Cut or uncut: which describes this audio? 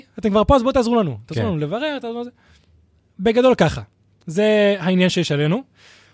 uncut